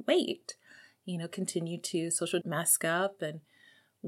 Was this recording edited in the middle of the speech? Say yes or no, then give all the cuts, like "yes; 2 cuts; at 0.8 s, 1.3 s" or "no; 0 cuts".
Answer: yes; 1 cut; at 2.4 s